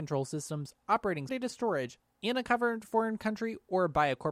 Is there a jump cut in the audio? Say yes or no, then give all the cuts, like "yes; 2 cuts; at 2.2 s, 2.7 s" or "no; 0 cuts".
yes; 1 cut; at 1.3 s